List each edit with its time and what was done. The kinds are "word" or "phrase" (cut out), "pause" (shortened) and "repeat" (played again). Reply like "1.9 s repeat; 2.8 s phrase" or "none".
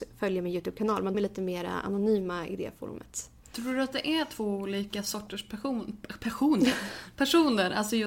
1.1 s word